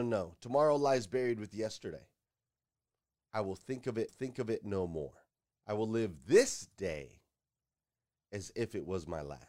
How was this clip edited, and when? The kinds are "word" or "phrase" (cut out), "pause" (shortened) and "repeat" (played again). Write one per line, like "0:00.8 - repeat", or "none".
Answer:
0:04.1 - repeat
0:05.5 - pause